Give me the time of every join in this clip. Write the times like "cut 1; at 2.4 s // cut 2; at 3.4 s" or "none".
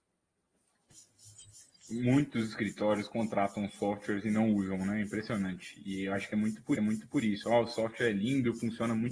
cut 1; at 6.8 s